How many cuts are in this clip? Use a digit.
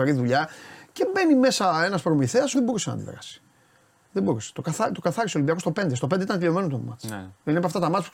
1